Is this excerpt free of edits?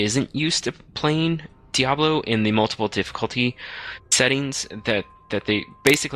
yes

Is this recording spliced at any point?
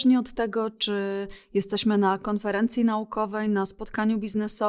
no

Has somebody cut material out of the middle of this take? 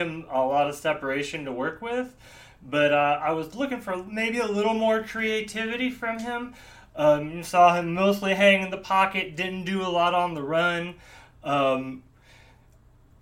no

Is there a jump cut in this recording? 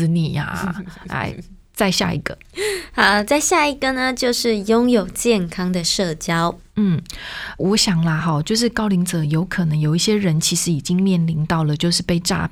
no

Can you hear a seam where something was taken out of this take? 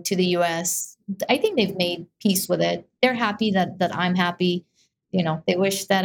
no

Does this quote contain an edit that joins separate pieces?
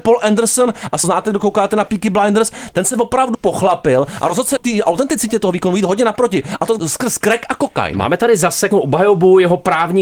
yes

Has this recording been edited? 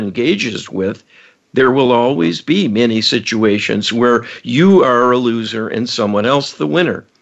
no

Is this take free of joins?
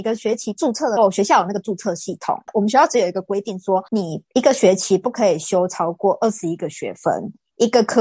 no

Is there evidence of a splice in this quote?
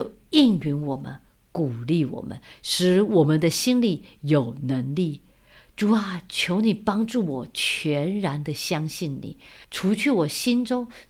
yes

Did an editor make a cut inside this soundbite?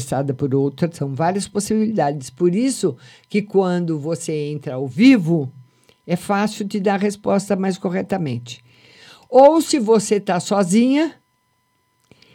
no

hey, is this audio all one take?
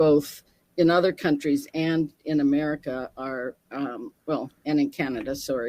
no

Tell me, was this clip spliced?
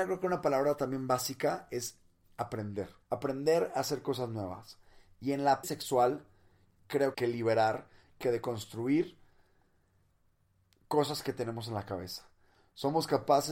yes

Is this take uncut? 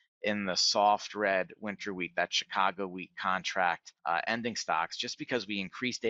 no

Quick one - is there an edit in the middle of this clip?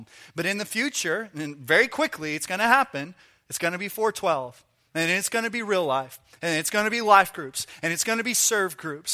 no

